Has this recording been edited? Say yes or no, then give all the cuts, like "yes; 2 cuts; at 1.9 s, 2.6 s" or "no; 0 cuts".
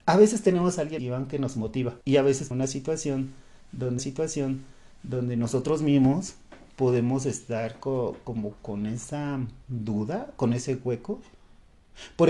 yes; 5 cuts; at 1.0 s, 2.0 s, 2.5 s, 4.0 s, 9.6 s